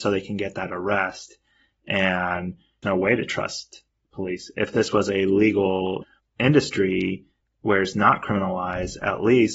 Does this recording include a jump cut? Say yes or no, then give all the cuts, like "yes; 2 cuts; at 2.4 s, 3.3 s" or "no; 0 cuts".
no; 0 cuts